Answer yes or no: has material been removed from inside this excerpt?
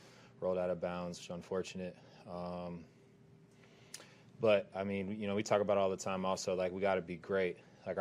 no